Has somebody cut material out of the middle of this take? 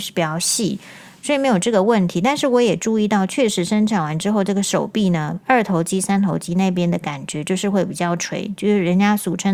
no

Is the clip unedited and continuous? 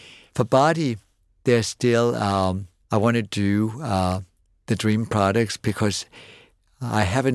yes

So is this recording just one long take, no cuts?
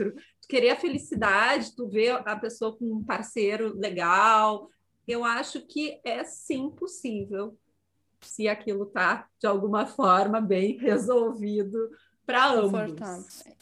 yes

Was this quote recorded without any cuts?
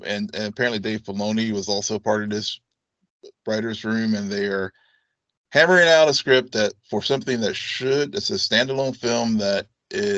yes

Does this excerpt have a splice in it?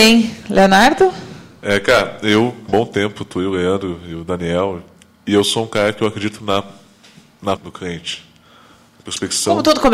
yes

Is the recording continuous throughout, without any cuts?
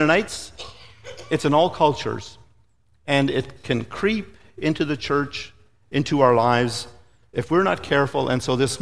yes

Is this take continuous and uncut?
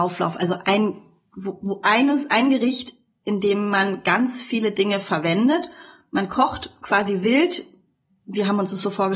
yes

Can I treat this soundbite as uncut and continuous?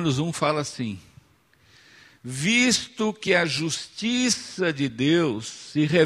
yes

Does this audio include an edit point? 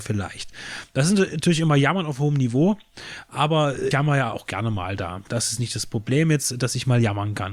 yes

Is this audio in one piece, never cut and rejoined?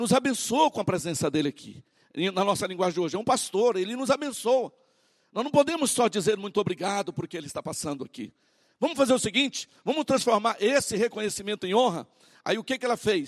yes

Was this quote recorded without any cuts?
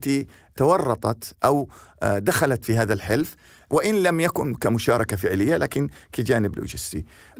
yes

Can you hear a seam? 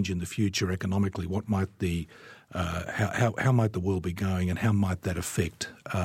no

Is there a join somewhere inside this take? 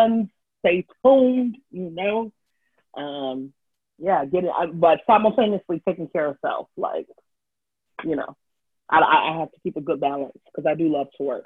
no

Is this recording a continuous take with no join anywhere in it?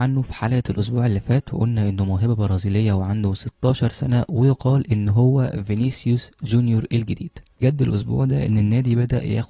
no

